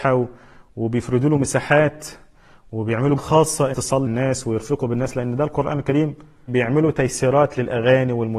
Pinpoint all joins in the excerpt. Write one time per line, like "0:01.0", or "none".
0:03.2
0:03.7
0:04.1
0:06.5